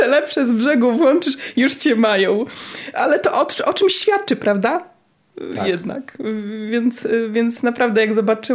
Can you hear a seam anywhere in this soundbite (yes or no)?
no